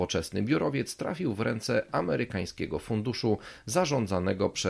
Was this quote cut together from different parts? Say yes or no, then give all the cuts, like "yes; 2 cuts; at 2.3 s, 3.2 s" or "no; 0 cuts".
no; 0 cuts